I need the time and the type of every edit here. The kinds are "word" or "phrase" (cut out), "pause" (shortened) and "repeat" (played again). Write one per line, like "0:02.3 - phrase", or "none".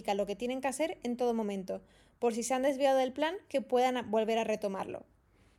none